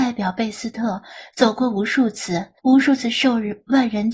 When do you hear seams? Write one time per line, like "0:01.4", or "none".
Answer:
0:02.6